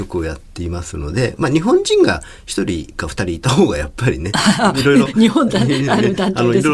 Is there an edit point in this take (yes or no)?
yes